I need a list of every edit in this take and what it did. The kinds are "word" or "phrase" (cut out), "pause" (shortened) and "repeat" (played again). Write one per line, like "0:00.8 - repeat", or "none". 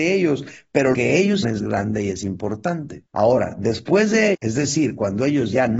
0:00.9 - word
0:01.4 - word
0:03.1 - pause
0:04.3 - word

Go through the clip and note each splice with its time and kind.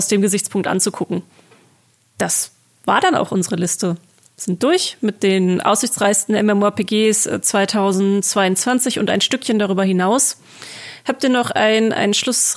none

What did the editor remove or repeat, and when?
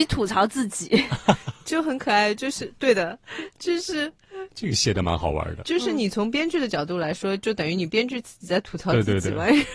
0:04.5 - pause

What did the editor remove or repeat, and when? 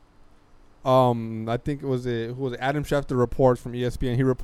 none

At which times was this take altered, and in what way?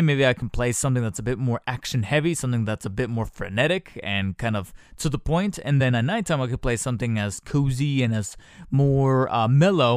none

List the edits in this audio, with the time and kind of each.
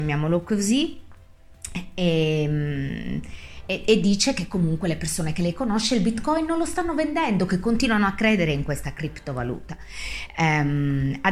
0:03.7 - word

